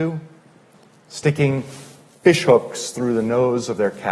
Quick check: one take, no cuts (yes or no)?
yes